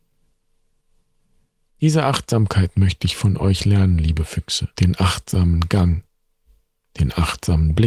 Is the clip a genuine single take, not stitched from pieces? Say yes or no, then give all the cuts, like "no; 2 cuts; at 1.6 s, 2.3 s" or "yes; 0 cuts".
no; 1 cut; at 4.7 s